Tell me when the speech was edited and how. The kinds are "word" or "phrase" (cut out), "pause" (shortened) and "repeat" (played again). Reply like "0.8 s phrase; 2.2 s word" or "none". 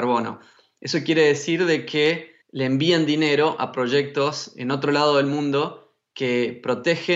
2.4 s pause